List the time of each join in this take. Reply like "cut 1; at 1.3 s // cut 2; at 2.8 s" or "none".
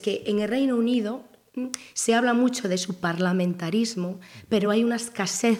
none